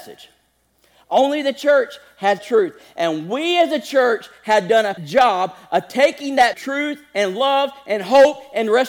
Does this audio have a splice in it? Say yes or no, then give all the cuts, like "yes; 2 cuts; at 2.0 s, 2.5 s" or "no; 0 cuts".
yes; 3 cuts; at 2.4 s, 5.0 s, 6.5 s